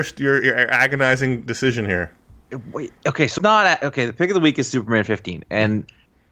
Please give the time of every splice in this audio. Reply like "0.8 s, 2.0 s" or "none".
3.4 s